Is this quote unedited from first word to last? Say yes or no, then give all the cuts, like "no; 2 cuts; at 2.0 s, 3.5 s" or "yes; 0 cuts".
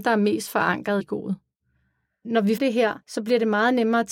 no; 3 cuts; at 1.0 s, 2.6 s, 3.0 s